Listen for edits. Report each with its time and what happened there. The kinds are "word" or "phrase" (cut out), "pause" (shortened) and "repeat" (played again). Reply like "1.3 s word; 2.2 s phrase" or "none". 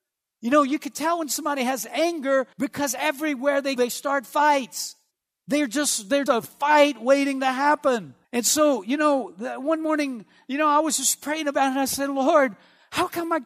2.5 s pause; 3.8 s word; 5.1 s pause; 6.3 s word; 8.2 s pause